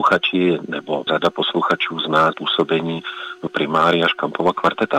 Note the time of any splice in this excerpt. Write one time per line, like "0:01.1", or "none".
0:01.1
0:02.3
0:03.5